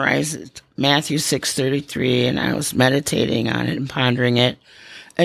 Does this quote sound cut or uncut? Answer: uncut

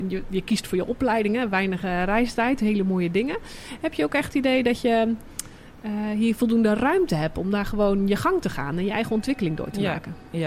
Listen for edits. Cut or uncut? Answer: uncut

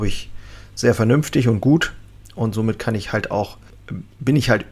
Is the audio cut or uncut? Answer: uncut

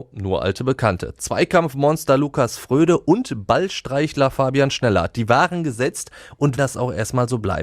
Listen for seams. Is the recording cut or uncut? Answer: cut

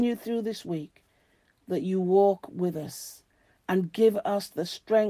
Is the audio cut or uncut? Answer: uncut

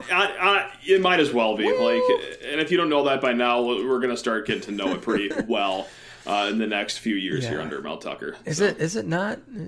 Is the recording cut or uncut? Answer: uncut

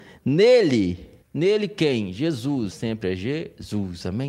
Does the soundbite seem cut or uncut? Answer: cut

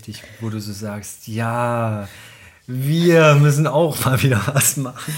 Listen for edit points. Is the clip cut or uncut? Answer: uncut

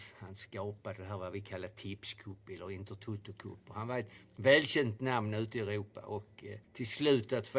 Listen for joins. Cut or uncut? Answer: cut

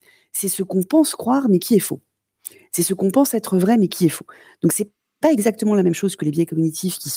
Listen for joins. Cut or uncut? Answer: uncut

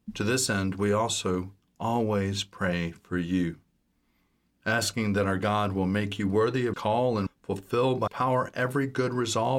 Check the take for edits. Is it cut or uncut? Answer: cut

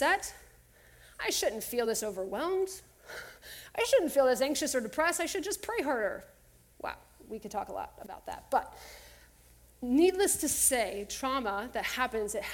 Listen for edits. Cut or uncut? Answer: uncut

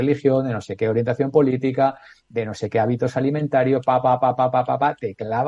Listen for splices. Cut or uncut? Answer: uncut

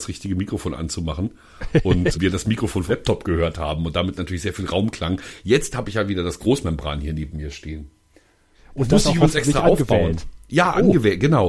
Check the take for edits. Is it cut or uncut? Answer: cut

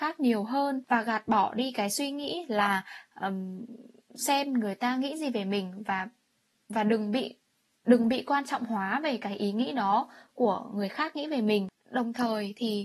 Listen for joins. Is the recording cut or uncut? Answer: uncut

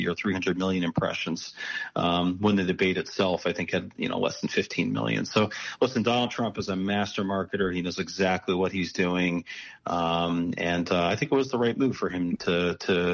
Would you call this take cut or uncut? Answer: uncut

